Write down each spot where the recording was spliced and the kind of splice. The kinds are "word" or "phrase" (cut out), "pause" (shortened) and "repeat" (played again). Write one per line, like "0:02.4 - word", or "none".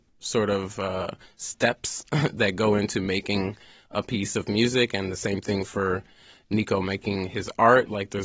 none